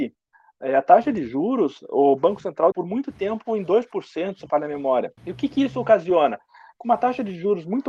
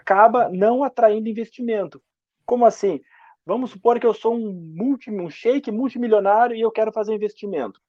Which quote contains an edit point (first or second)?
first